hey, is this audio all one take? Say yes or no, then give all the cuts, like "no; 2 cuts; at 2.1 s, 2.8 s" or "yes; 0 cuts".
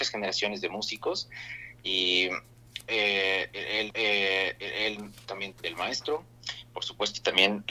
no; 2 cuts; at 3.9 s, 5.5 s